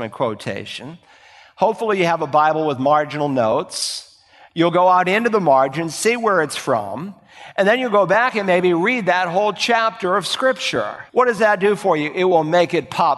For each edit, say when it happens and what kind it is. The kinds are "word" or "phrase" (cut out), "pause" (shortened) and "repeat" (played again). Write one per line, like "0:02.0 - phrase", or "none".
0:11.1 - pause

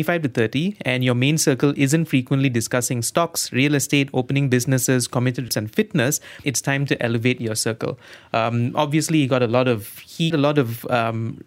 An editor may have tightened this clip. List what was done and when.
0:05.5 - word
0:06.4 - word
0:10.3 - word

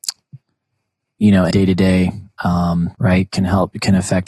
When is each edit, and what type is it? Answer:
0:01.5 - word
0:02.9 - word

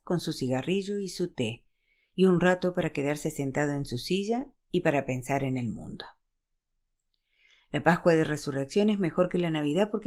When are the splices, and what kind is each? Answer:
none

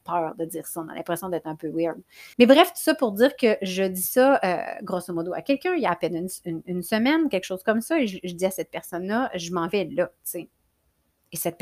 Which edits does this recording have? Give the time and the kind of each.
0:02.3 - pause

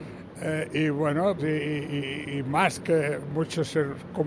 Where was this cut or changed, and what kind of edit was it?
0:01.4 - word

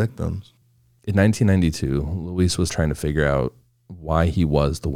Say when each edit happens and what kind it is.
0:02.7 - word

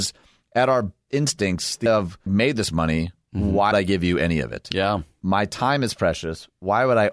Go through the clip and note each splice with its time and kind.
0:01.1 - word
0:01.9 - word
0:02.3 - word
0:03.7 - word

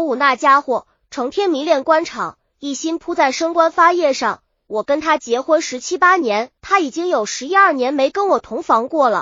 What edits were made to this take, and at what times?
0:06.6 - pause

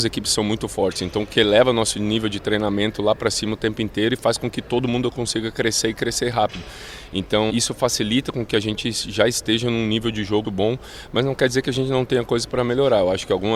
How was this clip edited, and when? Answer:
0:07.5 - word
0:10.4 - word

